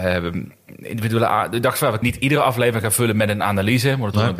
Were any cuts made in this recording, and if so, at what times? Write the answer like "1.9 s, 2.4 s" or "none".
2.0 s